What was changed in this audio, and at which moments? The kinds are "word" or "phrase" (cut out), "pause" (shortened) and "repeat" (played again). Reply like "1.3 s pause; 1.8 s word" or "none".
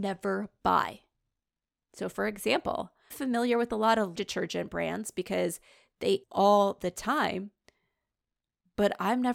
3.1 s word; 4.2 s word; 6.2 s word